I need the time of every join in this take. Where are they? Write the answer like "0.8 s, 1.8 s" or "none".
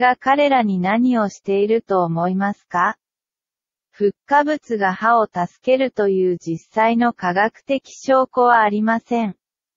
none